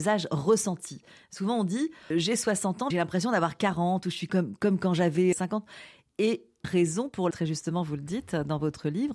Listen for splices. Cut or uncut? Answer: cut